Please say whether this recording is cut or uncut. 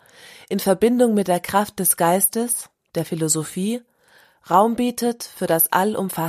uncut